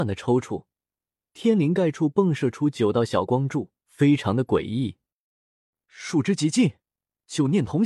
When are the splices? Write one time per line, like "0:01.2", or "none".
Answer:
0:03.8